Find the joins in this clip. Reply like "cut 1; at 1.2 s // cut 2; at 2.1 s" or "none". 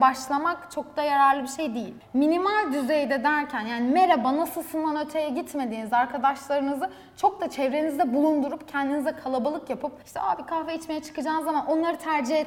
cut 1; at 10.0 s